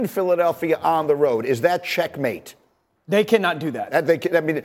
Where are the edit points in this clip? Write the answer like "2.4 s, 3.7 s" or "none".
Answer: none

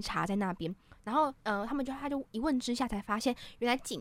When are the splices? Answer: 1.4 s

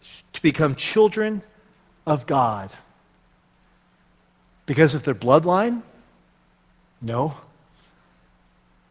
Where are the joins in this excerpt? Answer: none

